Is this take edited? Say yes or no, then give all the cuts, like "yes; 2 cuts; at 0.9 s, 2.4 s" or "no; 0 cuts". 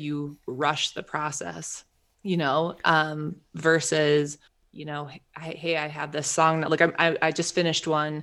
yes; 2 cuts; at 2.1 s, 4.5 s